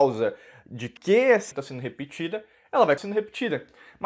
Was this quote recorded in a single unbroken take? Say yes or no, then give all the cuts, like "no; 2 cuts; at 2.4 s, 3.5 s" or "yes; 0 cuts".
no; 3 cuts; at 1.0 s, 1.5 s, 3.0 s